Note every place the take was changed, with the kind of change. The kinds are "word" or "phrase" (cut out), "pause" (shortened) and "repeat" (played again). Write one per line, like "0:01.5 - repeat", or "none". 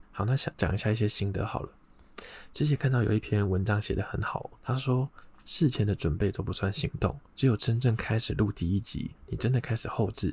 0:04.6 - pause
0:07.3 - pause
0:09.2 - pause